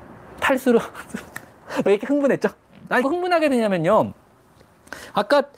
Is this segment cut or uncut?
cut